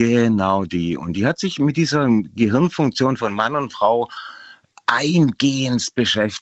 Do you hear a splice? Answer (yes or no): no